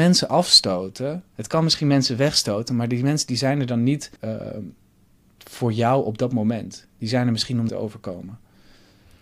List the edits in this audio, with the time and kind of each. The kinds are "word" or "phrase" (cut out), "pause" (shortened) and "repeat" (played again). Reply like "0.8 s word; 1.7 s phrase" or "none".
1.3 s pause; 4.2 s pause; 7.7 s phrase